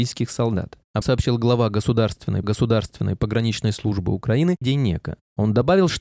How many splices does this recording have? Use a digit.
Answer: 3